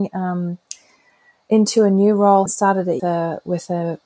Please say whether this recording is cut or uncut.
cut